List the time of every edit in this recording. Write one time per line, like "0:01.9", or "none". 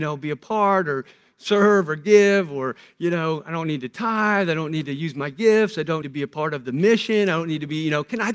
0:06.0